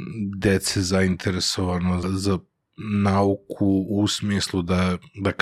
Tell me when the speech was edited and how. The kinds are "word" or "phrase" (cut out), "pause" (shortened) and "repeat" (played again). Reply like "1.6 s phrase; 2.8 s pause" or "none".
2.0 s word